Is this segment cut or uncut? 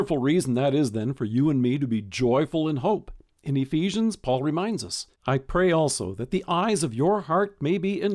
cut